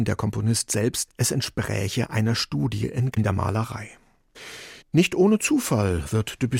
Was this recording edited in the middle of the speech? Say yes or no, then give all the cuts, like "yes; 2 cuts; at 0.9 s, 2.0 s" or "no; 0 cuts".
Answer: yes; 2 cuts; at 1.1 s, 3.1 s